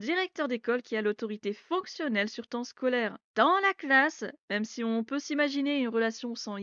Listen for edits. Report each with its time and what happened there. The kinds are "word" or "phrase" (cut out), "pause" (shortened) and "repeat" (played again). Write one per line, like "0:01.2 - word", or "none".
0:03.3 - pause